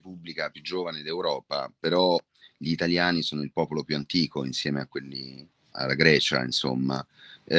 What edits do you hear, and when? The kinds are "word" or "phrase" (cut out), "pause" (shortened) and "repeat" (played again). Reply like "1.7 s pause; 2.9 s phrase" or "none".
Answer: 5.7 s word

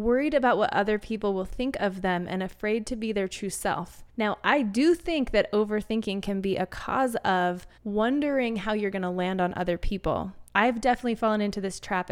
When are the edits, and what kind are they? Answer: 4.1 s pause; 7.8 s pause; 10.5 s pause

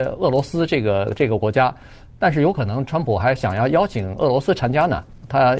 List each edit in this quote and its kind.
none

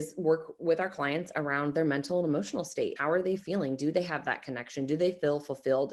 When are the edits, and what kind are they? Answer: 3.0 s word

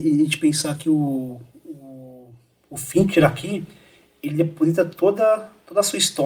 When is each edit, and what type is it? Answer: none

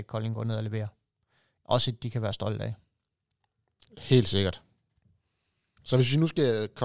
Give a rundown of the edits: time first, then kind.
none

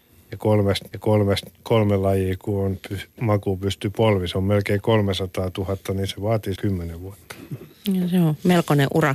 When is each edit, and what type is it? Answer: 0.9 s repeat; 6.6 s word

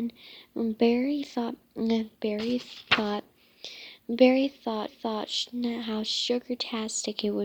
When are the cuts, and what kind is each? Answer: 4.9 s repeat

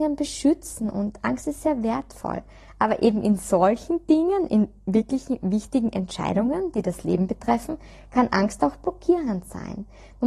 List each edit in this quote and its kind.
none

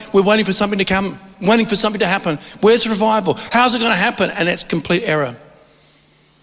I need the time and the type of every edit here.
none

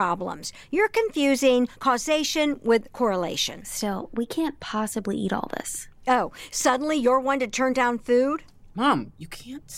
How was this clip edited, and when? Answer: none

